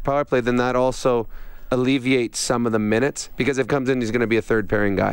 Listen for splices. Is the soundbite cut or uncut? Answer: cut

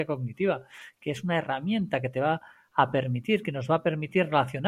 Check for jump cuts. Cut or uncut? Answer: uncut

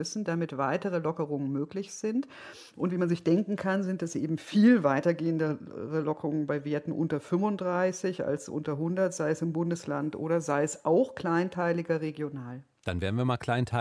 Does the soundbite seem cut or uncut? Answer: uncut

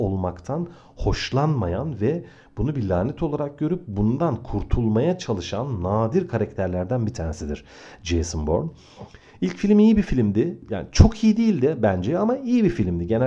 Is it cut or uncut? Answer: uncut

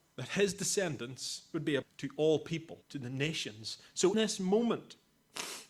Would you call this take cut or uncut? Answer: cut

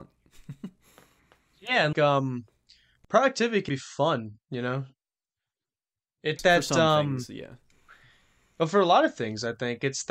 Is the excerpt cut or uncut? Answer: cut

